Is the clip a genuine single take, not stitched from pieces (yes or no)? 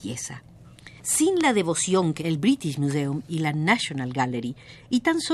no